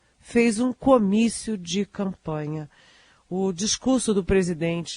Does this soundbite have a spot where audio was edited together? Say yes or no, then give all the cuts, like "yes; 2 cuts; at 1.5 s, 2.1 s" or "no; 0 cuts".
no; 0 cuts